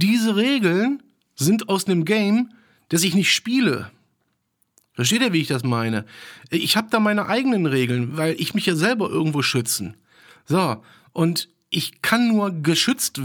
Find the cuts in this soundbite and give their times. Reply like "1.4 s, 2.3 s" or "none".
8.5 s